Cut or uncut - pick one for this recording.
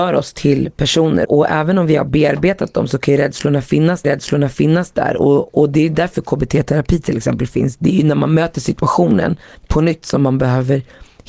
cut